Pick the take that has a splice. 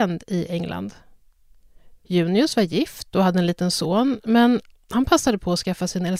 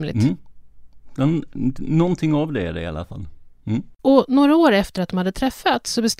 second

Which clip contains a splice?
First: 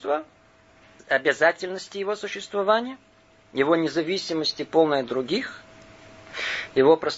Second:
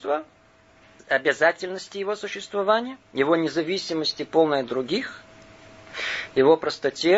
second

